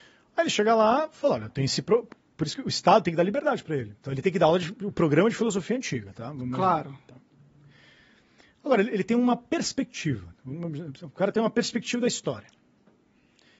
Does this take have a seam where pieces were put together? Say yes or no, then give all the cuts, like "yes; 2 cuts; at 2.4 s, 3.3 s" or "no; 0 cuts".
yes; 1 cut; at 4.0 s